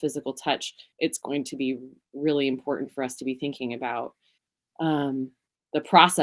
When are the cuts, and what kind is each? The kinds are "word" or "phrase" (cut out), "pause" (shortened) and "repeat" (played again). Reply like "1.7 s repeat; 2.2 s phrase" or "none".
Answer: 0.9 s pause; 4.4 s pause